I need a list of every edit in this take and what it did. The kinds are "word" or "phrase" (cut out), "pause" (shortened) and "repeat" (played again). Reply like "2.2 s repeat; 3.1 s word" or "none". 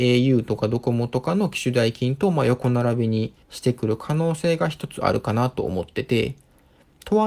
3.4 s pause